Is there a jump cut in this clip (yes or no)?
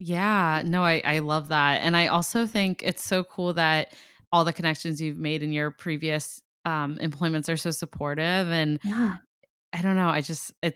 no